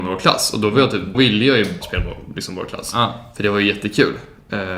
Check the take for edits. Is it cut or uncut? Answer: cut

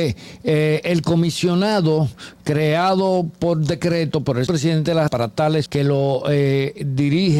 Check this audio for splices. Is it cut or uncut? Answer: cut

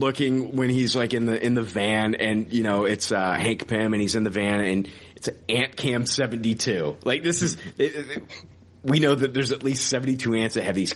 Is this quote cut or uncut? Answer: uncut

